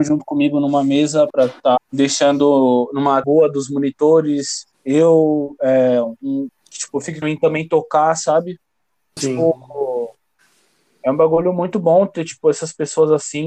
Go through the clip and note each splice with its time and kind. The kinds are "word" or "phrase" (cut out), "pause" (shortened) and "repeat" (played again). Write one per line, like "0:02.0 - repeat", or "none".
0:01.3 - word
0:01.8 - word
0:03.2 - word
0:04.7 - pause
0:06.5 - phrase
0:07.2 - phrase
0:09.2 - word